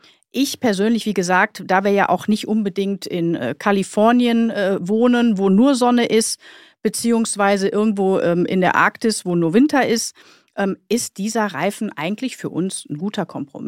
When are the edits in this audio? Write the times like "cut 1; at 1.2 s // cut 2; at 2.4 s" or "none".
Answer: none